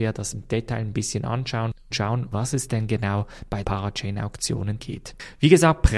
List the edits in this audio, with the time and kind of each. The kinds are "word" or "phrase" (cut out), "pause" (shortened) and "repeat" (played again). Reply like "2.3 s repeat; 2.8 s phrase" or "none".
1.9 s word; 2.3 s word; 3.6 s word; 4.8 s word

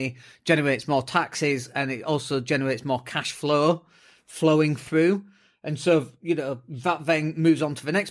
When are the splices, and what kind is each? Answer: none

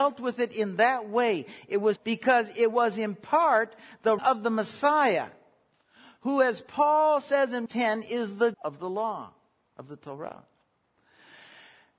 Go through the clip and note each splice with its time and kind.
2.0 s word; 4.2 s word; 7.7 s word; 8.5 s word

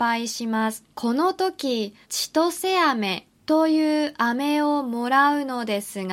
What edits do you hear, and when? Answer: 0.9 s pause; 2.0 s pause; 3.3 s pause

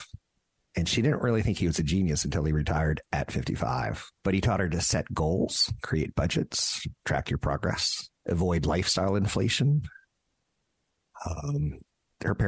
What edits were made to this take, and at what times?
4.2 s pause; 8.2 s pause

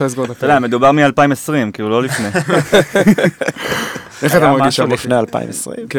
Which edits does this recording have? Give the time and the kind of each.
none

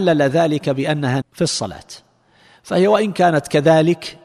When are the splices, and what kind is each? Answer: 1.2 s word

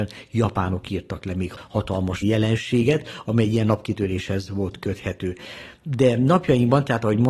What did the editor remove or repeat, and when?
2.2 s word

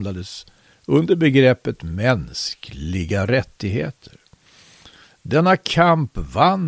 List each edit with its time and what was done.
none

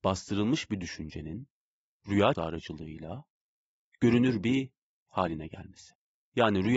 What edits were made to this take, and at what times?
2.3 s word; 5.1 s word

